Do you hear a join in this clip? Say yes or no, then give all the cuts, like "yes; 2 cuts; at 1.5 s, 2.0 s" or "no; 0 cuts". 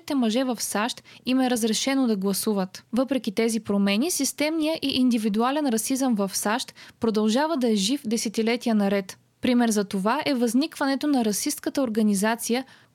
no; 0 cuts